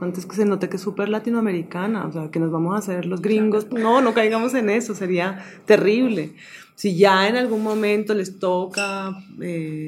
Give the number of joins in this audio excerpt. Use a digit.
1